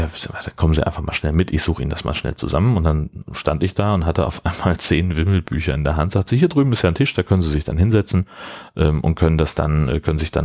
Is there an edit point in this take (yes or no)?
no